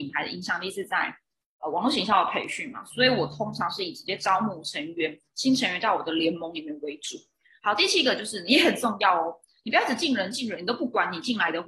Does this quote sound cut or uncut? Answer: uncut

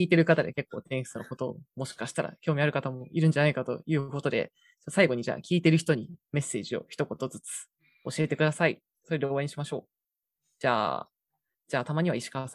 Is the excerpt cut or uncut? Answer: uncut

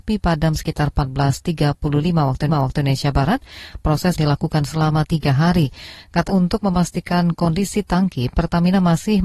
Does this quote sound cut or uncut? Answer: cut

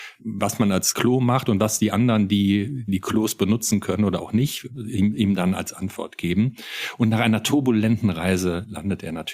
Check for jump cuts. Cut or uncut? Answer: cut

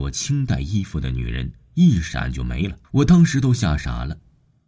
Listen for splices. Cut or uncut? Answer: cut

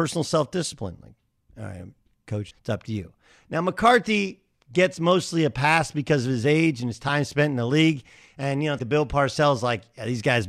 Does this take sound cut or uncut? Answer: cut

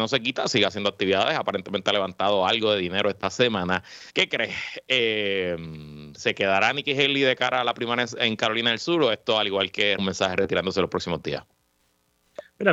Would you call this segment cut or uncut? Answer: cut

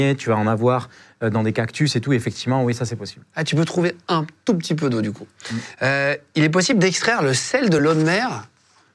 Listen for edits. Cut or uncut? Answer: uncut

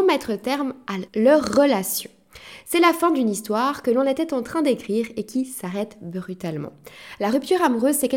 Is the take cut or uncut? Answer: cut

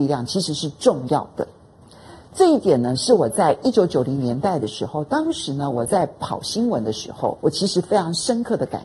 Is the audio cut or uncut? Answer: cut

